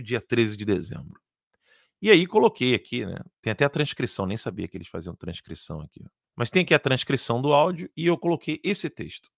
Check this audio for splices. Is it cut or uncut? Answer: cut